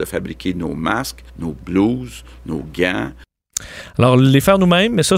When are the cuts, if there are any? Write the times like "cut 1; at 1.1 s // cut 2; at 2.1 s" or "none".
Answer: cut 1; at 1.3 s